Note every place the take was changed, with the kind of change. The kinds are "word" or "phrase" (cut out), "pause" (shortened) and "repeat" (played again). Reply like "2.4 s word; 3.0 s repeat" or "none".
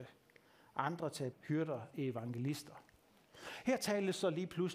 1.3 s word; 1.9 s word